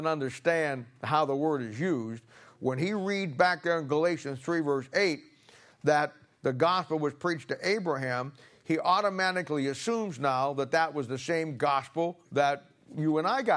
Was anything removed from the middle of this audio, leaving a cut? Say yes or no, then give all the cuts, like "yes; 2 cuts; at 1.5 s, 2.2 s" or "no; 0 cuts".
no; 0 cuts